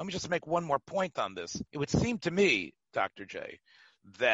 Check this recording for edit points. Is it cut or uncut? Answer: cut